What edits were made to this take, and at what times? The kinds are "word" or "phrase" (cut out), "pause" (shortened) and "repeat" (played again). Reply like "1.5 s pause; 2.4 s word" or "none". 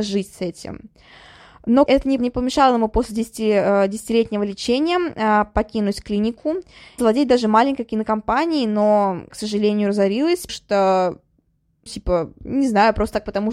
1.9 s word; 2.2 s word; 7.0 s word; 9.3 s word; 10.5 s word; 11.9 s word